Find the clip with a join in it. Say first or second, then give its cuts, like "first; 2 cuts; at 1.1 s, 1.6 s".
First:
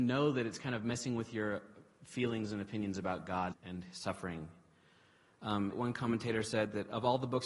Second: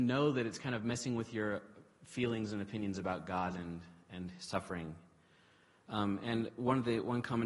first; 2 cuts; at 3.5 s, 5.7 s